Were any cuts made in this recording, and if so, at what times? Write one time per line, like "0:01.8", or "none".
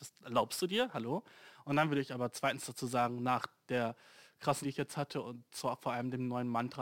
0:04.6